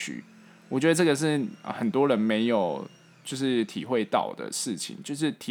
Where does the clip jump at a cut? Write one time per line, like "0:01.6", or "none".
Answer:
none